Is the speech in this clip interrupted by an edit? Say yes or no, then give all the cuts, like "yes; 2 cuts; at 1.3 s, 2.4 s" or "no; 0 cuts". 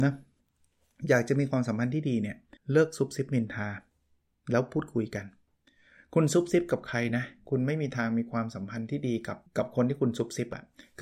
yes; 2 cuts; at 2.6 s, 9.5 s